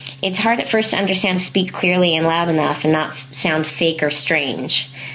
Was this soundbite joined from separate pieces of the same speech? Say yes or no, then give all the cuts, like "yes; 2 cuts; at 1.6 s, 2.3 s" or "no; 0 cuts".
yes; 1 cut; at 1.3 s